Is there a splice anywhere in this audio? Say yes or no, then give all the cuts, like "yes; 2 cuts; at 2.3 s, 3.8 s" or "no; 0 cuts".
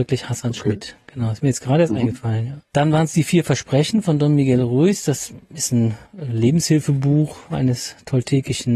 yes; 2 cuts; at 2.6 s, 6.1 s